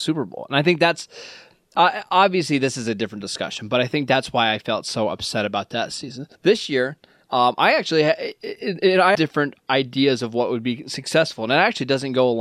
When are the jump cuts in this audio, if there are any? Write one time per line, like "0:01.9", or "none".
0:06.3
0:09.1